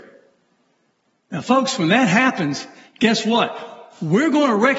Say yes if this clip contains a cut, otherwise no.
no